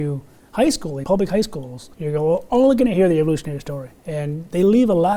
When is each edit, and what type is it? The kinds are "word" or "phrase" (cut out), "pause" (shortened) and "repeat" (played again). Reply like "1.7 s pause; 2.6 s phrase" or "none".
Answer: 1.0 s word; 1.9 s pause; 4.0 s pause